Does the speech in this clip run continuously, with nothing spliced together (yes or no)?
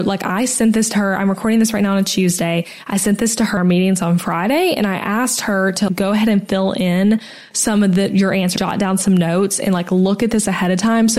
no